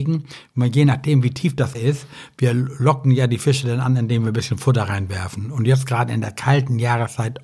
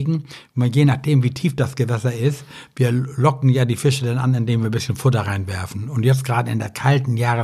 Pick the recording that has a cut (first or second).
first